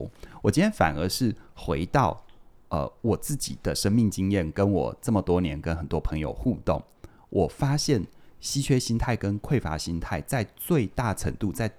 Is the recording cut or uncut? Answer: uncut